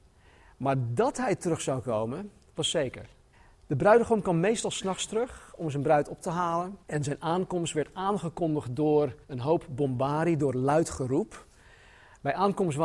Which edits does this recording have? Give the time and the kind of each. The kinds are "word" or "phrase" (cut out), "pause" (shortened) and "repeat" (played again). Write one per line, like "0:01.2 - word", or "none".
0:03.3 - pause
0:06.8 - pause
0:09.2 - pause